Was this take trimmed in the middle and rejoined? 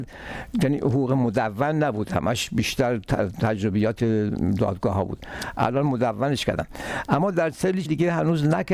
yes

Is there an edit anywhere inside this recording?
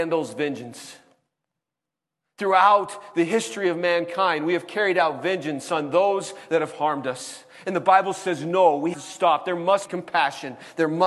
yes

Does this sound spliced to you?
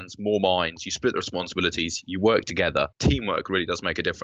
yes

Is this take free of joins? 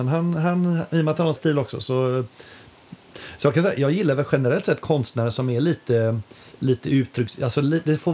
no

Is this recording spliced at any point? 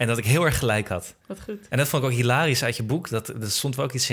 yes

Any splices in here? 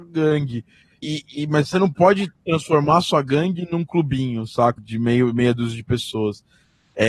yes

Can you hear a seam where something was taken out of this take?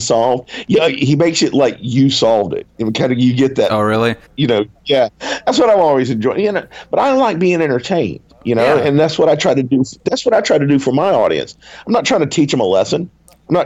yes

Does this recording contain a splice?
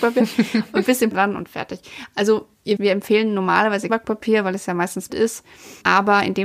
yes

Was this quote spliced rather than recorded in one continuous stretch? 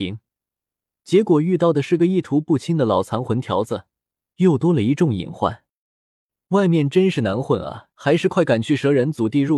yes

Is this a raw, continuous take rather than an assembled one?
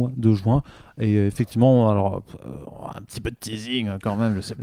yes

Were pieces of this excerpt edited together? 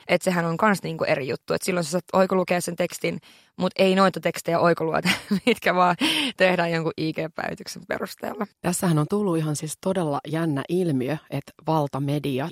yes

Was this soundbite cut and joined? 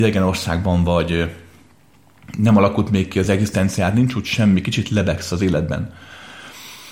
no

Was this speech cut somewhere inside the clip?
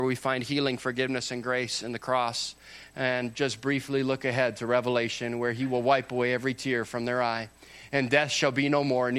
no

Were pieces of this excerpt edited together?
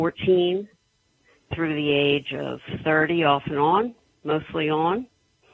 no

